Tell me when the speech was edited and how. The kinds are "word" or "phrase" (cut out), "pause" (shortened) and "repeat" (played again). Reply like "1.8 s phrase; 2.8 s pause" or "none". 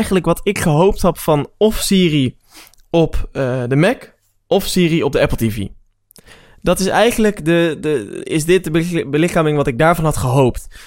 none